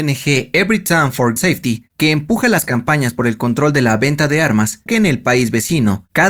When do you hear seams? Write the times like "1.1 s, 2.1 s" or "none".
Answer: 1.4 s, 4.9 s